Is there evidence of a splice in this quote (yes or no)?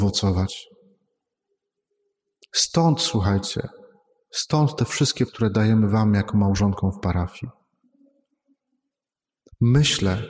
yes